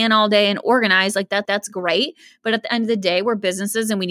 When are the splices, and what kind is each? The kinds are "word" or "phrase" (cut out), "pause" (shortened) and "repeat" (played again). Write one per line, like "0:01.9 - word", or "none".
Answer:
0:01.4 - repeat